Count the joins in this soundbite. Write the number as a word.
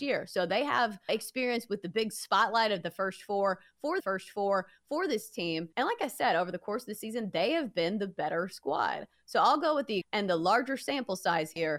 four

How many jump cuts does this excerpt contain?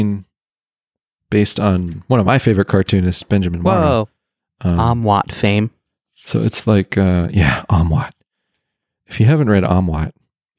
zero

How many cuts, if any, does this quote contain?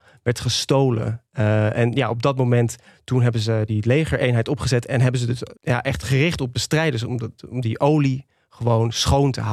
three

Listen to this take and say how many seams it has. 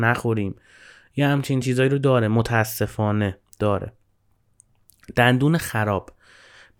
zero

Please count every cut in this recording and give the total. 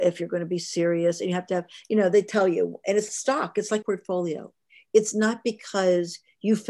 two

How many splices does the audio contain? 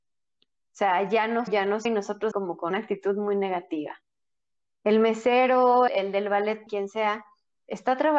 six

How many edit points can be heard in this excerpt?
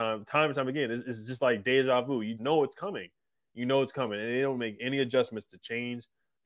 one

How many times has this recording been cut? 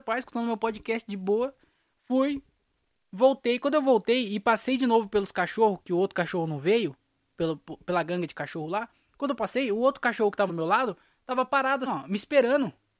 three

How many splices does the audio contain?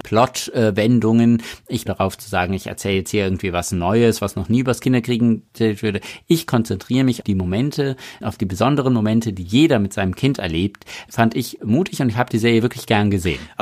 three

